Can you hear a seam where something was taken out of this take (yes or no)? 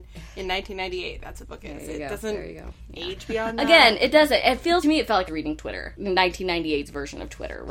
yes